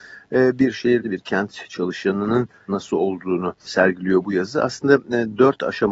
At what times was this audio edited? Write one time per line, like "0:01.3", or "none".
0:01.0
0:02.7
0:03.7